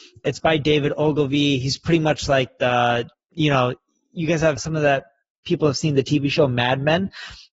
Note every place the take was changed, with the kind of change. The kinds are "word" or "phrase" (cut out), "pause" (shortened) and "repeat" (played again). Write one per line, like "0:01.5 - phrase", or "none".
none